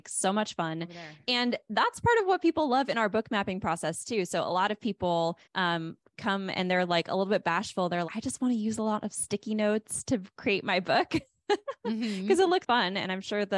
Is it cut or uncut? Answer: cut